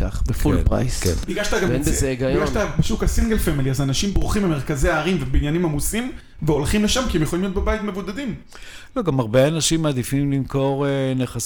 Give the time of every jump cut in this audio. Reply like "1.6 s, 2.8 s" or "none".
none